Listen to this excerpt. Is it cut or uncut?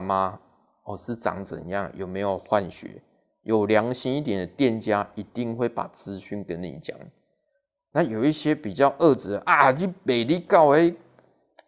uncut